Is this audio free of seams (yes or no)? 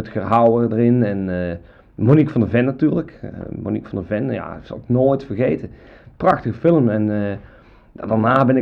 yes